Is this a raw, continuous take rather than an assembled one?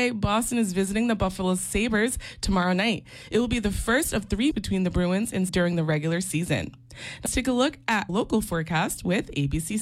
no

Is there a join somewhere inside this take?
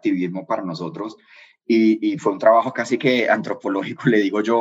no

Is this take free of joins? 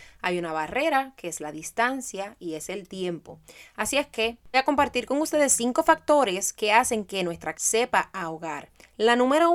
no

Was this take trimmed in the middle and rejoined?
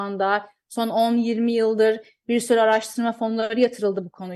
no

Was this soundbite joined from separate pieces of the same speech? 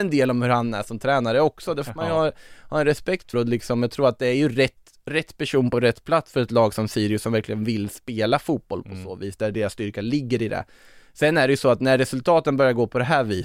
yes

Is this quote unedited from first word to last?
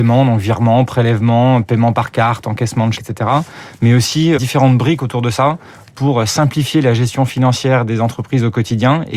no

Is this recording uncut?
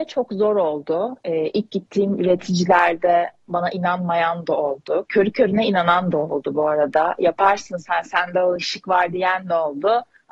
yes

